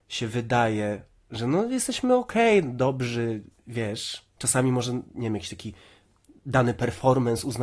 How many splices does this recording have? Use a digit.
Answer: 1